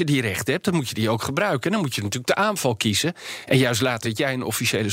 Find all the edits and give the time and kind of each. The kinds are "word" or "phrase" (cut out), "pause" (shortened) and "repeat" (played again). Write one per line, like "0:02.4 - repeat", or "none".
0:04.0 - word